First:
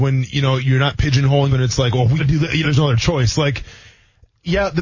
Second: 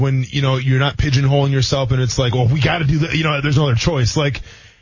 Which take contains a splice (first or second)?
first